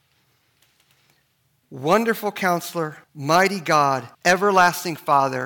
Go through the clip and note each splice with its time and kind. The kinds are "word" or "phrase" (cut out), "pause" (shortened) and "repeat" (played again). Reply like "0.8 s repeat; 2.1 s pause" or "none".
3.0 s pause; 4.1 s pause

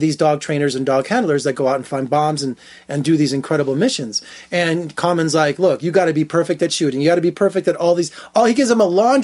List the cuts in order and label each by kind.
none

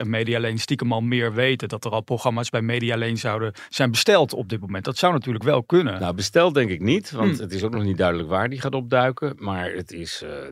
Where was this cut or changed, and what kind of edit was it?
none

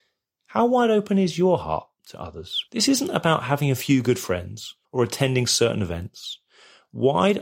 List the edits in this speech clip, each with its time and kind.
2.7 s pause; 4.8 s pause

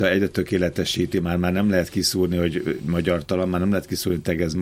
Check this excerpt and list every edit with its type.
none

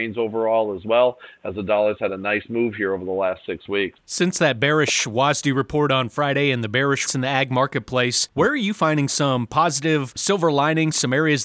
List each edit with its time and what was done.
7.1 s word

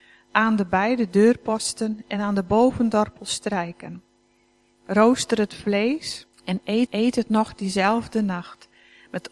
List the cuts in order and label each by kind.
6.3 s pause; 6.9 s repeat

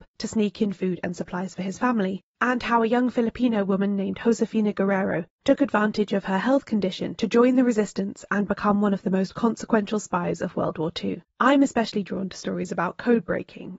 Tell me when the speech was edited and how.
none

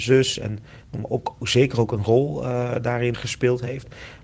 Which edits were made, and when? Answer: 3.1 s word

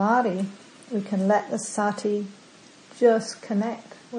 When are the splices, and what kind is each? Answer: none

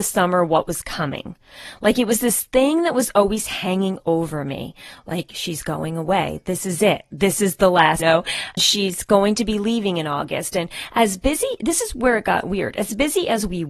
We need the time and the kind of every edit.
8.0 s phrase; 8.6 s word

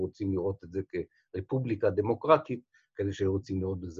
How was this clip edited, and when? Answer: none

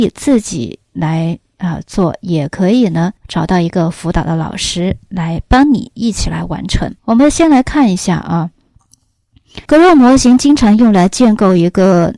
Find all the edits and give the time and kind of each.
3.2 s pause; 7.0 s pause; 9.7 s pause

